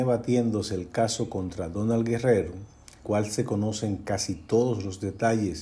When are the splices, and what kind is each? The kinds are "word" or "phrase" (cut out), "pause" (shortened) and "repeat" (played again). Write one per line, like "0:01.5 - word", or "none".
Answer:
0:03.0 - word